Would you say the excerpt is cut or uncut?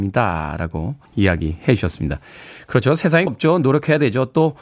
cut